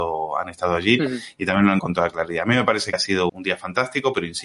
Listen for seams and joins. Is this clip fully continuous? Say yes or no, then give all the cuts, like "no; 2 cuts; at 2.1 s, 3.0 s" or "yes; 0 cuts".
no; 3 cuts; at 1.8 s, 2.9 s, 3.3 s